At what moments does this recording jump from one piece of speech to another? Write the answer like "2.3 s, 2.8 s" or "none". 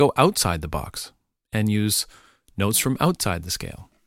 none